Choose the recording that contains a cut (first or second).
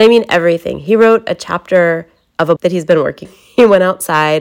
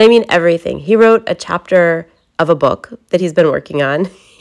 first